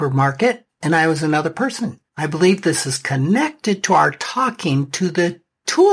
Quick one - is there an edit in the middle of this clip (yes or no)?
yes